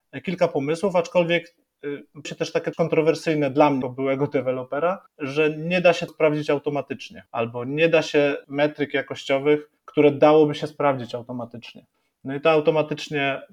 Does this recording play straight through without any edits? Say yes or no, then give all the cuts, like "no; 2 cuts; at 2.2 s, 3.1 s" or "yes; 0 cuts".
no; 9 cuts; at 2.2 s, 2.7 s, 3.8 s, 5.1 s, 6.1 s, 7.3 s, 8.4 s, 9.8 s, 11.9 s